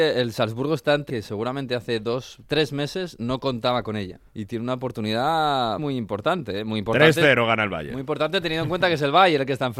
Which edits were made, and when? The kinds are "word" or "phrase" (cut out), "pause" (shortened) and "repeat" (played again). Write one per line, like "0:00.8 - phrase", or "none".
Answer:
0:01.1 - phrase
0:04.3 - pause
0:05.8 - word